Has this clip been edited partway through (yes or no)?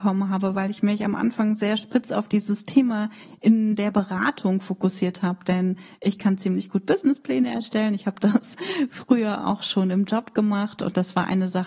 no